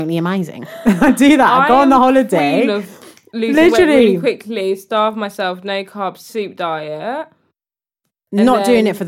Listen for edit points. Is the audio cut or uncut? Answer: uncut